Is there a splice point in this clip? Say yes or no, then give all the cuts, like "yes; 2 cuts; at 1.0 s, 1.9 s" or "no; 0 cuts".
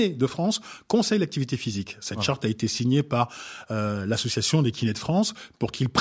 no; 0 cuts